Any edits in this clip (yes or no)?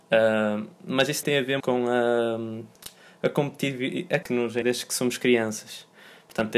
yes